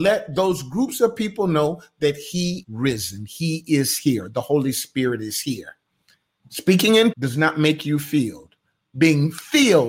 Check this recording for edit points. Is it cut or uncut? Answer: cut